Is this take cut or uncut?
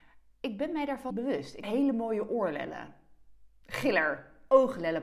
cut